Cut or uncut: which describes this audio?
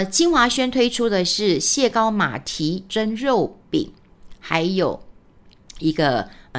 uncut